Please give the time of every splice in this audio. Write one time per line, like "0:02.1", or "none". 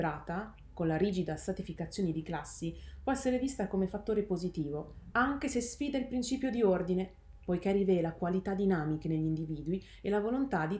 none